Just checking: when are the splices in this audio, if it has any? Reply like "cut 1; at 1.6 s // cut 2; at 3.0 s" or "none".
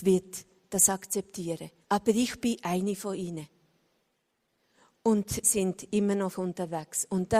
cut 1; at 1.8 s // cut 2; at 5.4 s // cut 3; at 6.3 s